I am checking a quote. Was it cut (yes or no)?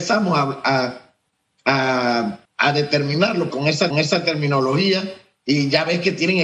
yes